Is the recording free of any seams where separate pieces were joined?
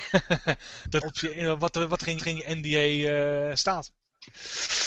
no; 3 cuts; at 1.0 s, 1.3 s, 2.2 s

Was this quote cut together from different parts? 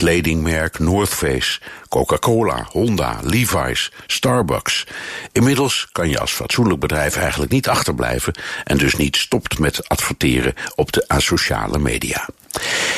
no; 0 cuts

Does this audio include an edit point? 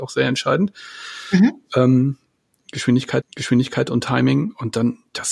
yes; 1 cut; at 3.2 s

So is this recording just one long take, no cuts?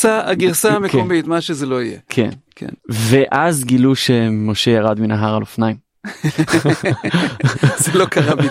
no; 1 cut; at 2.8 s

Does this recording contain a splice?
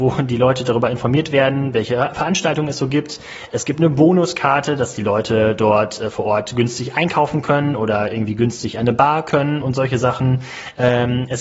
yes; 1 cut; at 9.6 s

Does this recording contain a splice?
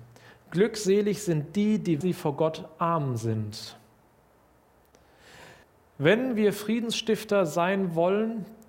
yes; 2 cuts; at 2.0 s, 5.6 s

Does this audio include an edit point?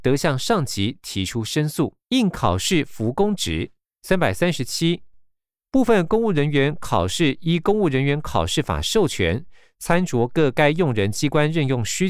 yes; 2 cuts; at 2.0 s, 3.8 s

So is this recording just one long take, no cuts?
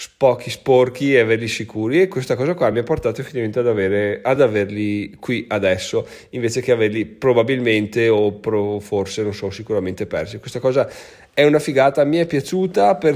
yes; 0 cuts

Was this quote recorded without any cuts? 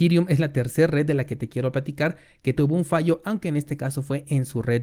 no; 1 cut; at 2.6 s

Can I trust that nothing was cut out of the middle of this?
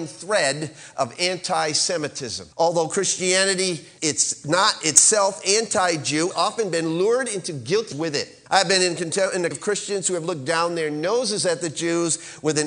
no; 6 cuts; at 2.5 s, 4.0 s, 6.3 s, 7.9 s, 8.5 s, 9.5 s

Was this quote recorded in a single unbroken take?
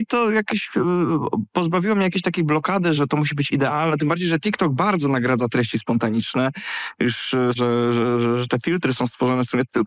no; 2 cuts; at 2.9 s, 7.5 s

